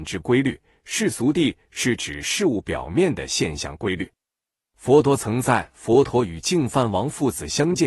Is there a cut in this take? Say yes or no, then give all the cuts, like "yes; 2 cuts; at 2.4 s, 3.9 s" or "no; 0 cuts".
no; 0 cuts